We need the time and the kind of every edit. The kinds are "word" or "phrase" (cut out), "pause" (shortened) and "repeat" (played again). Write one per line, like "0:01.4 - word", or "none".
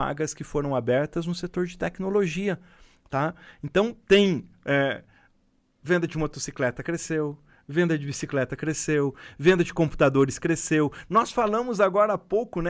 none

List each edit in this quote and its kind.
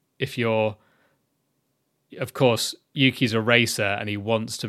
none

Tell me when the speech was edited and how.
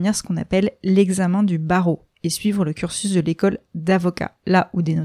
none

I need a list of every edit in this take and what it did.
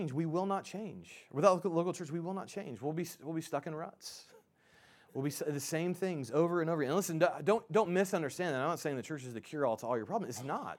none

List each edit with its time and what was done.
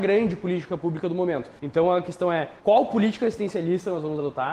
0:01.6 - pause
0:02.6 - pause

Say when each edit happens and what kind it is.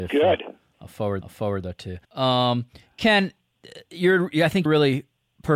0:01.2 - repeat
0:02.0 - pause
0:02.8 - pause
0:04.7 - word

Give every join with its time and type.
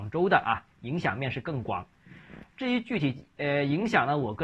none

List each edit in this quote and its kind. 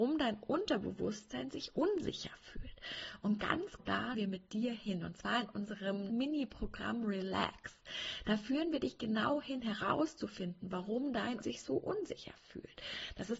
0:03.8 - word
0:04.1 - word
0:06.1 - word
0:11.4 - word

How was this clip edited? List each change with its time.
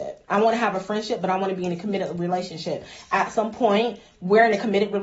none

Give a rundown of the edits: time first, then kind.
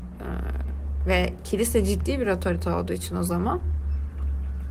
none

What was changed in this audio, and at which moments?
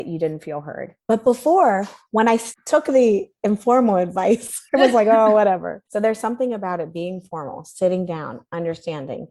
0:01.0 - pause
0:04.7 - pause
0:05.9 - pause

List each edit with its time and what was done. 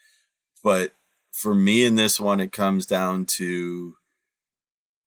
none

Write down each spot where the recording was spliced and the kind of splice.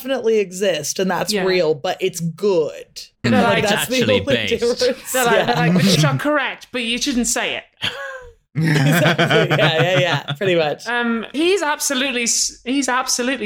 0:03.2 - word
0:06.0 - word
0:11.3 - word

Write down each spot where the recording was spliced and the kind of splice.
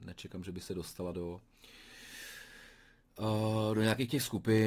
none

